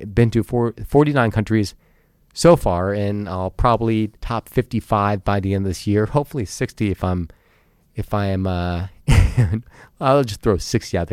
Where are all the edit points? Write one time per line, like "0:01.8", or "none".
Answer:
0:04.2

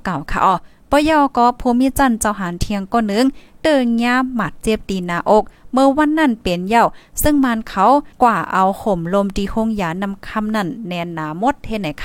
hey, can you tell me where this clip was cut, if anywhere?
0:08.1

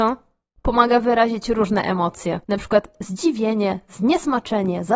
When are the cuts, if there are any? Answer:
0:02.4

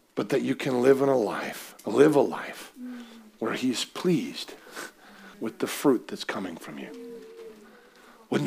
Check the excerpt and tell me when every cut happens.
0:05.3

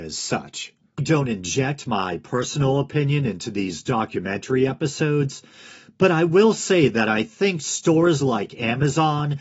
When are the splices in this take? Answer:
0:01.0

